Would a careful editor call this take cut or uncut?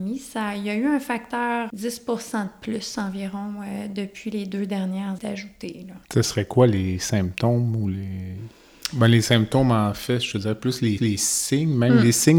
cut